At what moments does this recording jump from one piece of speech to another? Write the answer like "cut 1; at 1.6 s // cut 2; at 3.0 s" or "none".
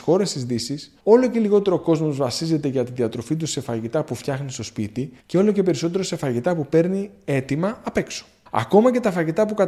cut 1; at 1.0 s // cut 2; at 5.2 s // cut 3; at 8.5 s

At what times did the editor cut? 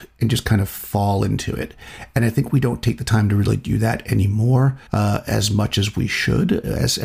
cut 1; at 4.9 s

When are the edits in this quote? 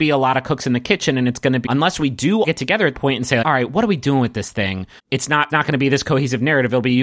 cut 1; at 1.7 s // cut 2; at 2.4 s // cut 3; at 2.9 s // cut 4; at 3.4 s // cut 5; at 5.0 s // cut 6; at 5.5 s

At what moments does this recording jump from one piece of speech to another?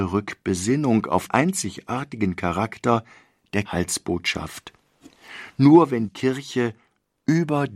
cut 1; at 1.3 s // cut 2; at 3.7 s // cut 3; at 6.1 s

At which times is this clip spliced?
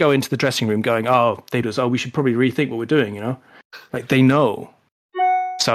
cut 1; at 1.6 s

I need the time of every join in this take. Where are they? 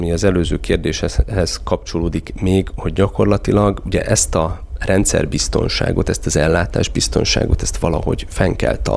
none

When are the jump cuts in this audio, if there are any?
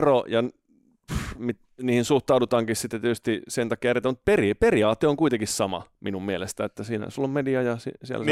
none

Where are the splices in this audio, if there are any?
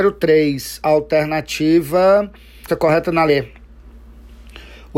cut 1; at 2.7 s // cut 2; at 3.3 s

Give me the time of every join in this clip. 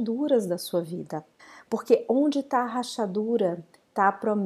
cut 1; at 1.4 s

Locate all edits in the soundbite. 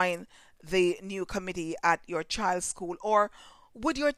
none

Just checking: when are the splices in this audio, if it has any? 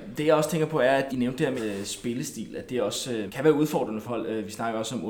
cut 1; at 1.1 s // cut 2; at 1.6 s // cut 3; at 3.3 s // cut 4; at 4.1 s

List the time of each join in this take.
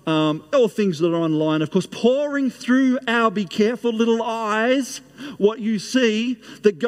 none

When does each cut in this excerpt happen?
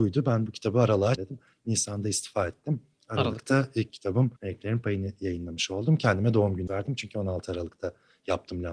cut 1; at 1.2 s // cut 2; at 4.4 s // cut 3; at 6.7 s

